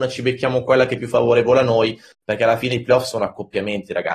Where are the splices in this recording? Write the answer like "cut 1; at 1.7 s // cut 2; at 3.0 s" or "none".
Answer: none